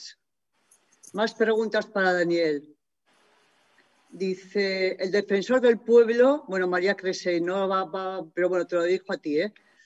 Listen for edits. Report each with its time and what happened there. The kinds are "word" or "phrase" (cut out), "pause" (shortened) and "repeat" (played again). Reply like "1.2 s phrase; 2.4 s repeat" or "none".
none